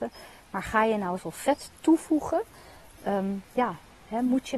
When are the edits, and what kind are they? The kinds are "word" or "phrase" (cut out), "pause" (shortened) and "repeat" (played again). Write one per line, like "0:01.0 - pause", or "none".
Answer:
0:01.2 - word
0:03.0 - word
0:03.5 - pause